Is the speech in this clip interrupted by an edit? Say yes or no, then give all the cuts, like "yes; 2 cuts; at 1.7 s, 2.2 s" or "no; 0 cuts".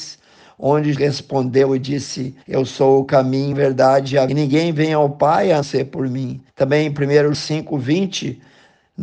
yes; 7 cuts; at 0.9 s, 2.4 s, 3.5 s, 4.3 s, 5.6 s, 6.5 s, 7.3 s